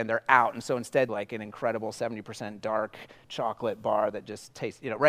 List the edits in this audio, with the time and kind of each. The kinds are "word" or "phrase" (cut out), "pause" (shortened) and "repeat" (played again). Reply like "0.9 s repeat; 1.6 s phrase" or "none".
1.1 s phrase